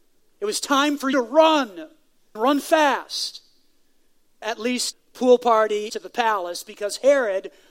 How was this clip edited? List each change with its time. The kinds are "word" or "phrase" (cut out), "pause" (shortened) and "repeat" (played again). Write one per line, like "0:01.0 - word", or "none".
0:01.1 - word
0:02.4 - word
0:04.4 - word
0:04.9 - word
0:05.9 - word